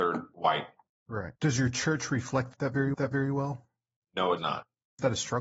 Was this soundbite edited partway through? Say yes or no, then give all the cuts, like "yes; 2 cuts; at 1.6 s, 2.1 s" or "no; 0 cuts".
yes; 3 cuts; at 1.4 s, 2.9 s, 4.4 s